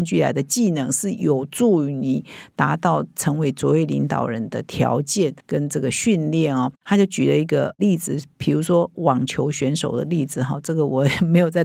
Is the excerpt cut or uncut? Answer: cut